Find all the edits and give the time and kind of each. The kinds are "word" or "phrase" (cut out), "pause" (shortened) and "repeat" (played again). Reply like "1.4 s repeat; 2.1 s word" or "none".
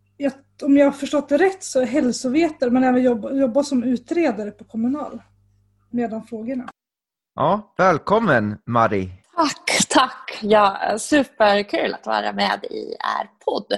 7.1 s pause; 9.2 s pause